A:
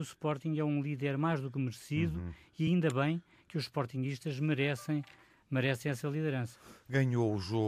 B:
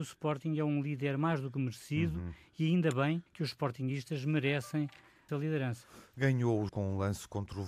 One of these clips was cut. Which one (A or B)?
B